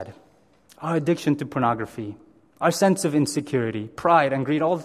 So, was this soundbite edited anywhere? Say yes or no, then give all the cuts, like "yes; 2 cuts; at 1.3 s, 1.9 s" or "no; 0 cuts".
no; 0 cuts